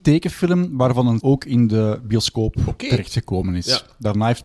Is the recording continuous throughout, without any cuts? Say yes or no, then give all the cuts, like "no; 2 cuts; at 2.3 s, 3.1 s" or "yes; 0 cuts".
no; 1 cut; at 1.2 s